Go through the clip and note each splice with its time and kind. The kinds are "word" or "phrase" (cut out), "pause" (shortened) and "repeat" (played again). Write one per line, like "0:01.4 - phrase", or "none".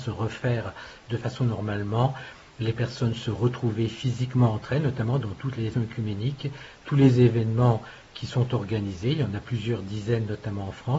0:05.7 - word